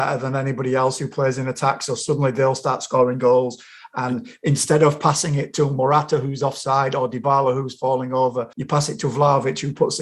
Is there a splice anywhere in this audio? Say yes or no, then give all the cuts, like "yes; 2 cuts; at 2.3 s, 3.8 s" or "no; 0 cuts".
yes; 1 cut; at 8.5 s